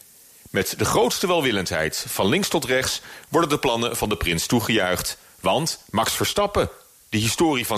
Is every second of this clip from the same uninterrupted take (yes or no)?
yes